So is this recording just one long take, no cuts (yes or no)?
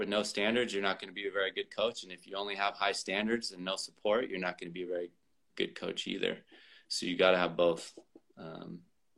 yes